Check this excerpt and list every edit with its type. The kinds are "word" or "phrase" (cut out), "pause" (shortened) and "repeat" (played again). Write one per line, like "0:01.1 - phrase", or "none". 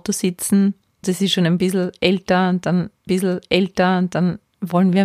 0:01.0 - word
0:03.1 - repeat